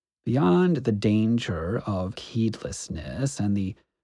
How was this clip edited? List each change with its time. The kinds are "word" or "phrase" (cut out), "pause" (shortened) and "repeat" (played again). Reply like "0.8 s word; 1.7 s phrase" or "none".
2.2 s word